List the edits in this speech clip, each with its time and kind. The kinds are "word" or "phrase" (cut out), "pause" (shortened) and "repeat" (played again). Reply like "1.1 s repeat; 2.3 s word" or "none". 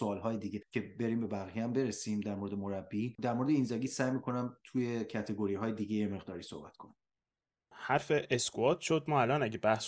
none